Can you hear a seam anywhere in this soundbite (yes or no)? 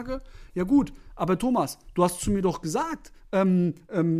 no